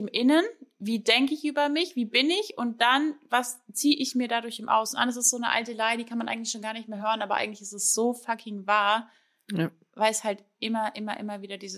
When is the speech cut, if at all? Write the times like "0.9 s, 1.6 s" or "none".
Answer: none